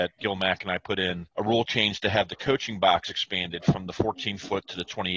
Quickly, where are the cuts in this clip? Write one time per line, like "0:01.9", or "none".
0:01.3